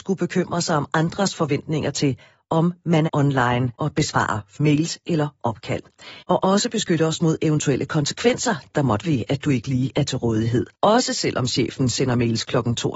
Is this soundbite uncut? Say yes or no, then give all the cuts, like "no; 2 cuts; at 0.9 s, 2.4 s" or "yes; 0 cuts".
no; 6 cuts; at 3.1 s, 3.7 s, 4.5 s, 6.2 s, 9.0 s, 10.7 s